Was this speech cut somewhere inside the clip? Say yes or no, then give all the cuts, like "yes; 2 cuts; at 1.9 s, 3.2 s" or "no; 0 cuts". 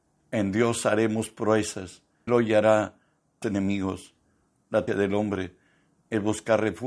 yes; 3 cuts; at 2.3 s, 3.4 s, 4.9 s